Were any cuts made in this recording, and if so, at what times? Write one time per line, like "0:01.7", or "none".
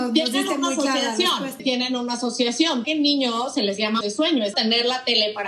0:01.6
0:02.8
0:04.0
0:04.5